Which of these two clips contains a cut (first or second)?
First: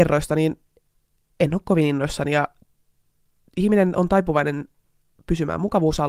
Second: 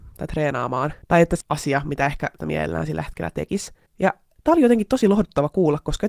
second